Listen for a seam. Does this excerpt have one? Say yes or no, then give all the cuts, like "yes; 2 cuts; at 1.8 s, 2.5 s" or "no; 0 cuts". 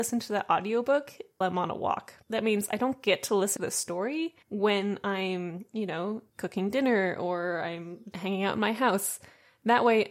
yes; 6 cuts; at 1.4 s, 2.2 s, 3.6 s, 4.4 s, 6.3 s, 8.1 s